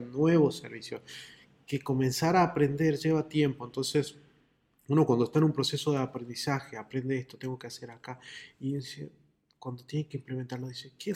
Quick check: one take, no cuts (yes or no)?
yes